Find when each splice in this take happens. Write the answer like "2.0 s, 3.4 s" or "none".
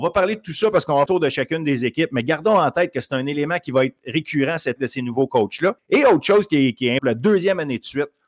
1.1 s, 4.8 s, 5.8 s, 7.0 s